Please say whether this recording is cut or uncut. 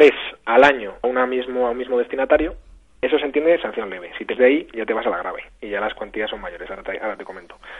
cut